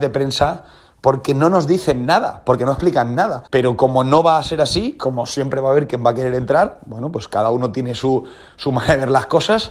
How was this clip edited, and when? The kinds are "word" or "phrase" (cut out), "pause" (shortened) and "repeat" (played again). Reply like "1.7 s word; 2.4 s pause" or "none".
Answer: 3.5 s pause